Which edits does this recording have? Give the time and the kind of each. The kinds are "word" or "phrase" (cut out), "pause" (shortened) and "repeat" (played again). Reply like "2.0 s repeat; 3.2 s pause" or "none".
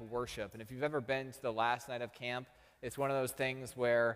none

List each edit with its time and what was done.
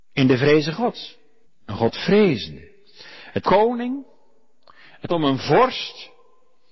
1.4 s pause; 3.4 s phrase; 5.1 s word

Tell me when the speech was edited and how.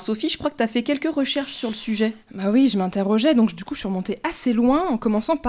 none

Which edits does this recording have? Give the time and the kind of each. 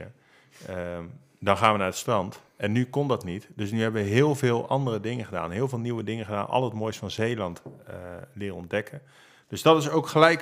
none

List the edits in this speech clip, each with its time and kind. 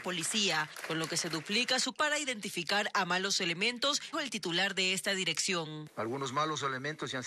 1.9 s word; 4.1 s word

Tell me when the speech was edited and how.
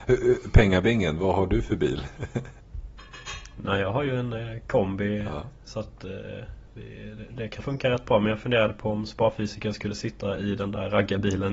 7.6 s word

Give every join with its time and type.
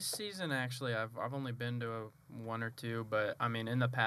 none

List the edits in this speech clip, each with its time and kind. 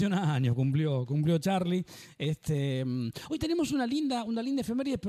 3.4 s word

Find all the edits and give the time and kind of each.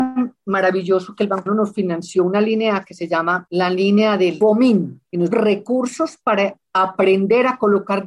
1.5 s word; 5.3 s word

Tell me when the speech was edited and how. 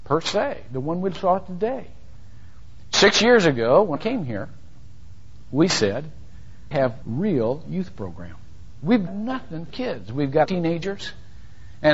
4.0 s word; 6.7 s word; 7.0 s word; 9.1 s word; 9.7 s word; 10.4 s phrase

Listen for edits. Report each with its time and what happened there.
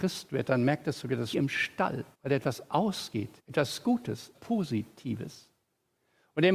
1.3 s word; 2.1 s pause; 3.4 s pause; 4.3 s word

